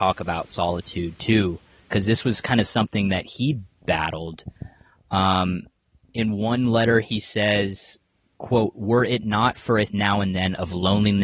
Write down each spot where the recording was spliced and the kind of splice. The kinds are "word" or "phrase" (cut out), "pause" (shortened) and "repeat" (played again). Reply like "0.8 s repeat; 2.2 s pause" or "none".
9.9 s word

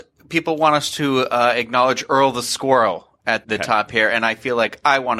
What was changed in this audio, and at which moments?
3.4 s word

